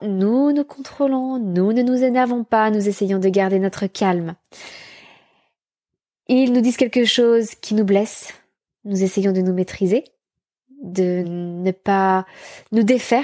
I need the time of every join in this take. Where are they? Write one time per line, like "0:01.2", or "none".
none